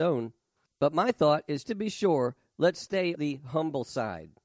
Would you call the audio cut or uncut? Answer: cut